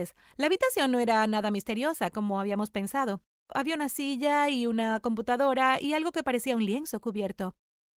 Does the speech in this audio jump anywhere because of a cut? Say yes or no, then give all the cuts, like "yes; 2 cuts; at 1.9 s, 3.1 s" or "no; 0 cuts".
no; 0 cuts